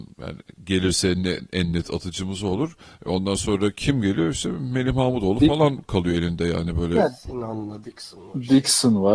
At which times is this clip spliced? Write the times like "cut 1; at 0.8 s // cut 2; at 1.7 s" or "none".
none